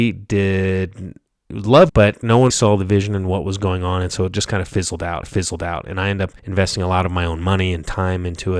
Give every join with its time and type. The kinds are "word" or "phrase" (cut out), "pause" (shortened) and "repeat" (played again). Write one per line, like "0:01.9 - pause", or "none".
0:01.9 - phrase
0:02.5 - word
0:05.2 - repeat
0:06.4 - pause